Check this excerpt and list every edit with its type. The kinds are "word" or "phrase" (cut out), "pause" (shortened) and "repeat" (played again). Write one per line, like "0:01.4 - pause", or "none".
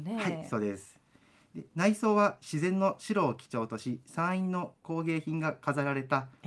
none

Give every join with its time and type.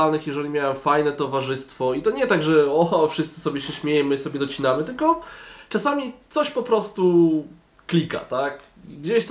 none

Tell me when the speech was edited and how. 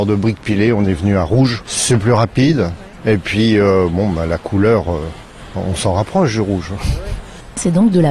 none

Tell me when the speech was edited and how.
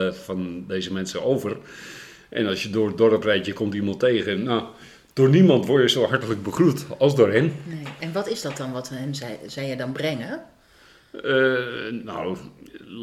none

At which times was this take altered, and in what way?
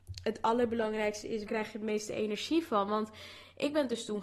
0:01.5 - word

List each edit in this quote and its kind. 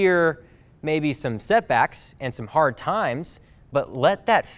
none

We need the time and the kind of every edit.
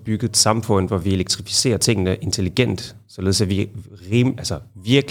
none

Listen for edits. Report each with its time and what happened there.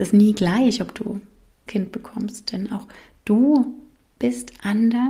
0:01.7 - phrase

